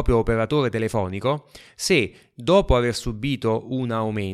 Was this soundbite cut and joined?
no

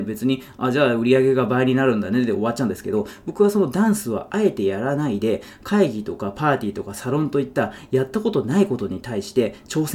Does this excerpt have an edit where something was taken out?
no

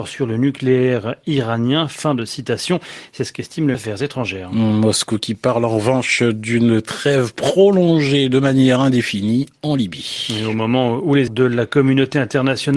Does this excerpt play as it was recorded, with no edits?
no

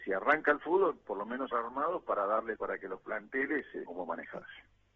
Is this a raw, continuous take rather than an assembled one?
no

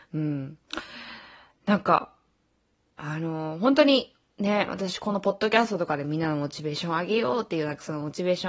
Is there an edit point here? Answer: no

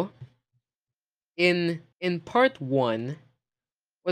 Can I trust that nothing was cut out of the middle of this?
no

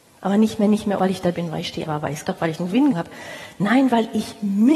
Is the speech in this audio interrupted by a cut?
yes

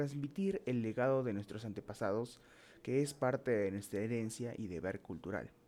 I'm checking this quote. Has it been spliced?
no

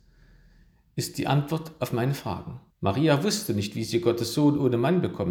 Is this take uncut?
no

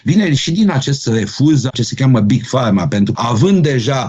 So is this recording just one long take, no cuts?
no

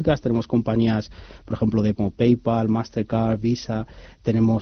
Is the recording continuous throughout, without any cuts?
no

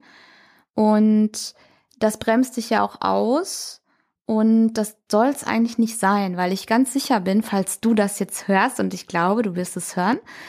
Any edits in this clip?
no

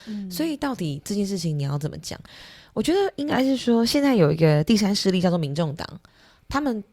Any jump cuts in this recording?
no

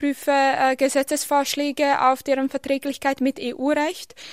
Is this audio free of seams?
yes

